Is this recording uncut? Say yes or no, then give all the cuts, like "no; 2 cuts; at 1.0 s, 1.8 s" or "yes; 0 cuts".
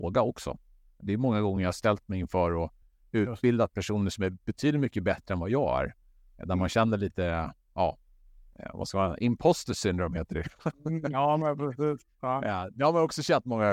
yes; 0 cuts